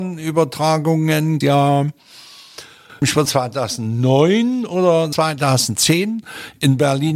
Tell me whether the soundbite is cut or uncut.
cut